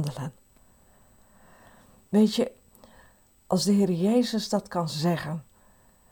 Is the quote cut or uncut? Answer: uncut